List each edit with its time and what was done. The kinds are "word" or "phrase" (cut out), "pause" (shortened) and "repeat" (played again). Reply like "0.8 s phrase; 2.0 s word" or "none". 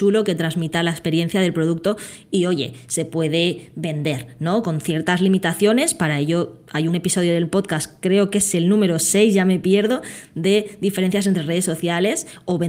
none